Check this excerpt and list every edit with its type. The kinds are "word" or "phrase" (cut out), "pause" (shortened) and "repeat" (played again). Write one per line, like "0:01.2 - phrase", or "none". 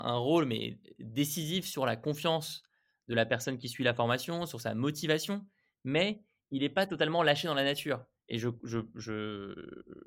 none